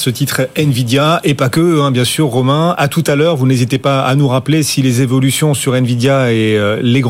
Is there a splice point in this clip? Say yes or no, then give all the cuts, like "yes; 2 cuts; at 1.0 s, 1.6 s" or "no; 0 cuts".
no; 0 cuts